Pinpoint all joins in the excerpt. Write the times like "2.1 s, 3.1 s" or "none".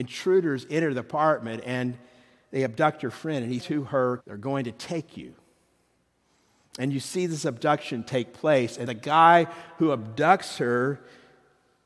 3.6 s, 4.2 s, 8.9 s